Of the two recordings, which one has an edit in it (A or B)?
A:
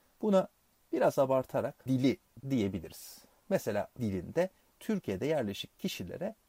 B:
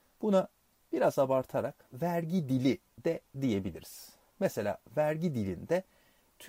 A